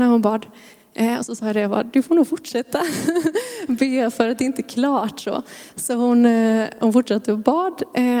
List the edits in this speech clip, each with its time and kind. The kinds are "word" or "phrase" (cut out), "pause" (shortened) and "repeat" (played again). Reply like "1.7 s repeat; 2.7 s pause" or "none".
none